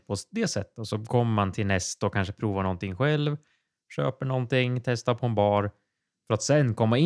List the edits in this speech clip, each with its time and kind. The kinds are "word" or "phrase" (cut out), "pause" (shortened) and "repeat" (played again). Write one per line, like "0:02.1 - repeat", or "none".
none